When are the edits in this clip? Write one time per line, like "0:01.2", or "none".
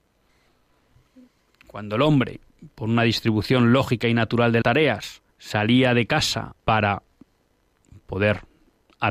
0:04.6
0:05.3
0:06.6